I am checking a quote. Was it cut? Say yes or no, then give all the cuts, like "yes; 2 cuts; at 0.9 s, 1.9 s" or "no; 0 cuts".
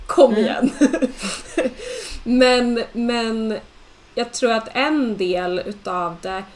no; 0 cuts